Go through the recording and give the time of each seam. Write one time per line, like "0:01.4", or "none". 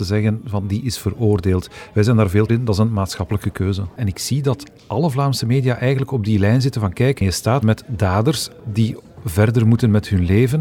0:02.5
0:07.6